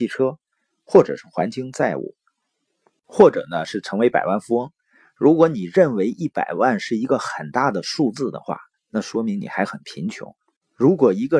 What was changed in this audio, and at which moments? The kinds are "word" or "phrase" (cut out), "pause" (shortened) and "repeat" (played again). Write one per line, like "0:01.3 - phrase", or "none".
none